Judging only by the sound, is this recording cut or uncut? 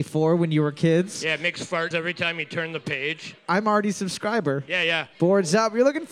cut